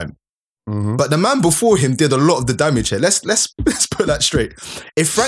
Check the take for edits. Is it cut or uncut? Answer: cut